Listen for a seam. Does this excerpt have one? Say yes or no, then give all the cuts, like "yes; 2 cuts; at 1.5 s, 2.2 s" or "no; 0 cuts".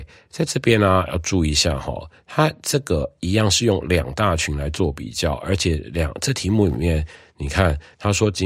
no; 0 cuts